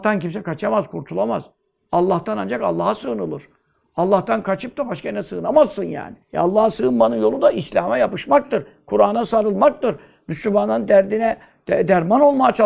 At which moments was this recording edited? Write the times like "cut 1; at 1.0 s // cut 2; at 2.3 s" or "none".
cut 1; at 6.2 s